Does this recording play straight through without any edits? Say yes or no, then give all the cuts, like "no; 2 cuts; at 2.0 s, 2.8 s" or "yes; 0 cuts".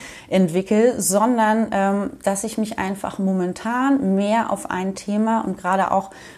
yes; 0 cuts